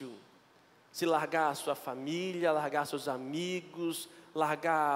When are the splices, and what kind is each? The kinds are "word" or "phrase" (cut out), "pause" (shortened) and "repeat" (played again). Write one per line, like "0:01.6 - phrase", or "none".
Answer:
none